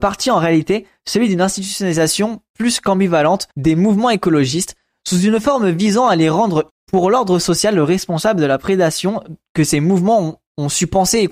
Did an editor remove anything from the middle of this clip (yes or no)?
yes